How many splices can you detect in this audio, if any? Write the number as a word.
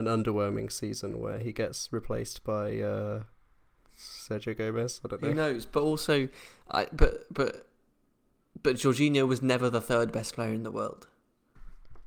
one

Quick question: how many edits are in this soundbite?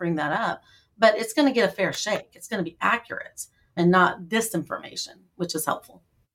one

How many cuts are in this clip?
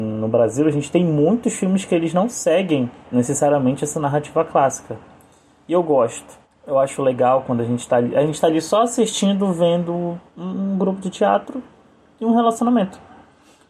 zero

